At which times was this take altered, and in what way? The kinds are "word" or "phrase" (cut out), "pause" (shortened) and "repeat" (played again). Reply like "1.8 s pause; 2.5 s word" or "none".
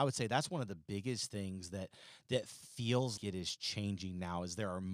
3.2 s word